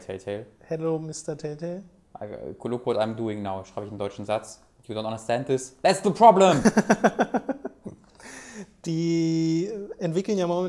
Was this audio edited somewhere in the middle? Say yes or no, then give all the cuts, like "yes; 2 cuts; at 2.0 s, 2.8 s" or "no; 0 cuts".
no; 0 cuts